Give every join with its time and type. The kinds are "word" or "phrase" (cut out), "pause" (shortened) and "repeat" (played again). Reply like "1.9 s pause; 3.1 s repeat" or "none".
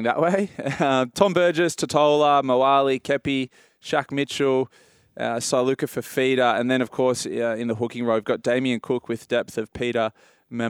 none

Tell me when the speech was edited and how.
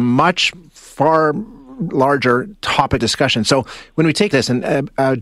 1.9 s word; 3.0 s word; 4.3 s phrase

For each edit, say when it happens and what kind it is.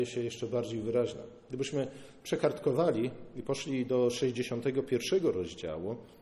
none

